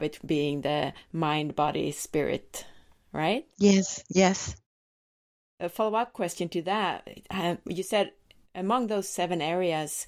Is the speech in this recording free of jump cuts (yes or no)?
yes